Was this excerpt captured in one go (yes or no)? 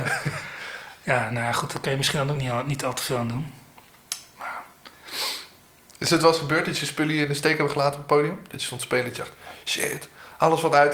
yes